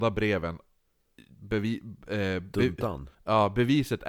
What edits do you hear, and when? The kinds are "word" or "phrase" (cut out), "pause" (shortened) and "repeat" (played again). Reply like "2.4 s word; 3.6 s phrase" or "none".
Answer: 3.1 s pause